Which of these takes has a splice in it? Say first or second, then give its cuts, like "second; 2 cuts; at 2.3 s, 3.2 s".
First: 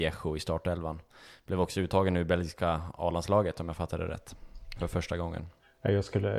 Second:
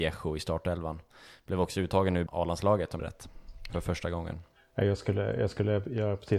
second; 2 cuts; at 2.3 s, 3.0 s